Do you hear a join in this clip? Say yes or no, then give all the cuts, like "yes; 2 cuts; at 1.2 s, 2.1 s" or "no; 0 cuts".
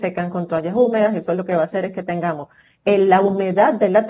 no; 0 cuts